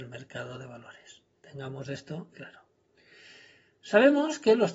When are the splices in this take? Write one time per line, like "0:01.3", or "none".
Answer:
0:01.3
0:02.3